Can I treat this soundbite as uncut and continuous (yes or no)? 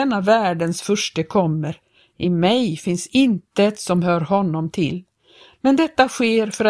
yes